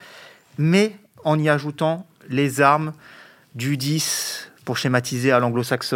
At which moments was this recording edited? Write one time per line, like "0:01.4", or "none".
none